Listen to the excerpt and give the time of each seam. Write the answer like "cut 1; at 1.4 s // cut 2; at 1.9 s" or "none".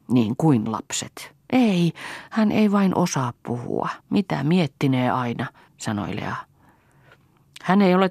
cut 1; at 1.4 s // cut 2; at 4.0 s // cut 3; at 5.7 s